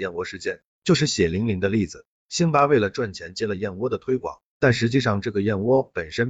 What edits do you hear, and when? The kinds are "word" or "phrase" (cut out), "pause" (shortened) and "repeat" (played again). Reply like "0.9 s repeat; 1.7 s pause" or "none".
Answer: 2.2 s pause